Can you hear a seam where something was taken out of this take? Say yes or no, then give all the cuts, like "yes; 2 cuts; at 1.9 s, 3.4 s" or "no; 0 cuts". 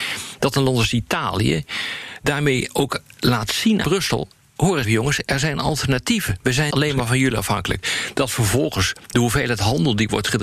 yes; 3 cuts; at 3.8 s, 4.8 s, 6.7 s